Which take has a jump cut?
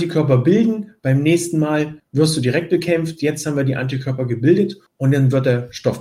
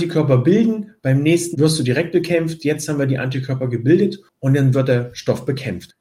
second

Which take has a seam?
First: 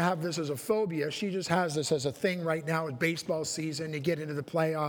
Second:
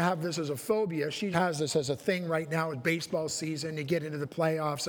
second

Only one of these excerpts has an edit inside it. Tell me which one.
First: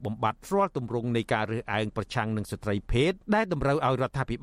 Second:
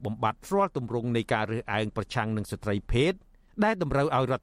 first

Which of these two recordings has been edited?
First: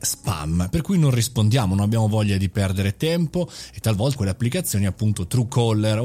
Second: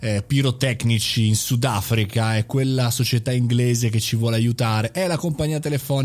first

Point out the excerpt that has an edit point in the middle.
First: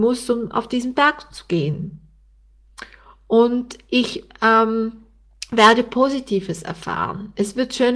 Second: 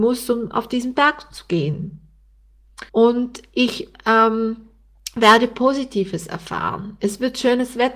second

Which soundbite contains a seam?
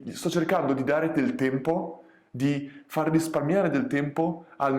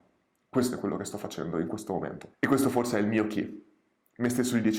second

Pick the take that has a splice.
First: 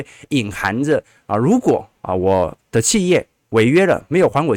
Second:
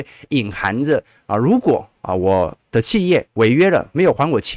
second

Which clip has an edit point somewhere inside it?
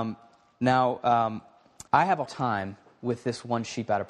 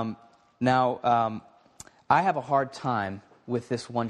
first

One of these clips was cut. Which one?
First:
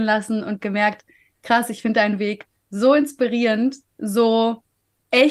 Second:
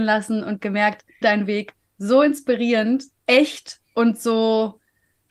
second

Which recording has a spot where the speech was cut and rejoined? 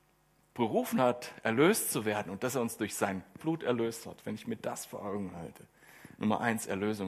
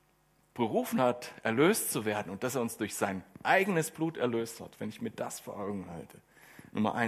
first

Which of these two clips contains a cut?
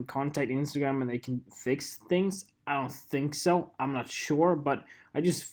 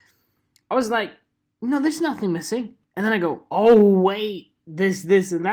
second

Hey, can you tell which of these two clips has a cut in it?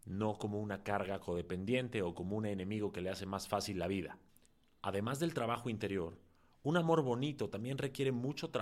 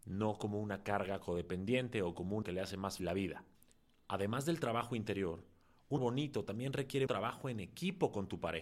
second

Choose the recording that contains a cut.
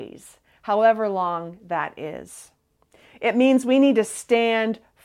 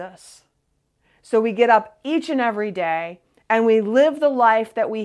first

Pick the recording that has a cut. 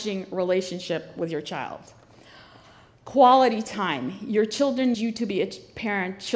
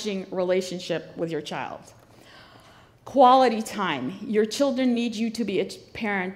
first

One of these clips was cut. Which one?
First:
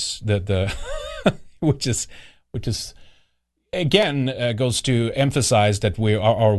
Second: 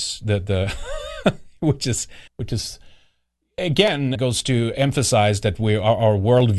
second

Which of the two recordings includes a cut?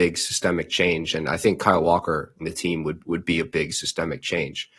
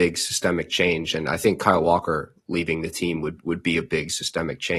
first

